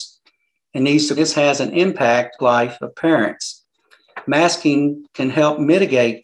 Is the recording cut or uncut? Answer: cut